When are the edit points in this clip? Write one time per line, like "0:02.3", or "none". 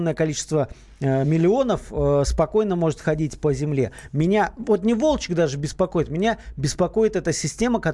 none